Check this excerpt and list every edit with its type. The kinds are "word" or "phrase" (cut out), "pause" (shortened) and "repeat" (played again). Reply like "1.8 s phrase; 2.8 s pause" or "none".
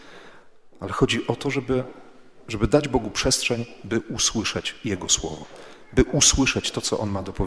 none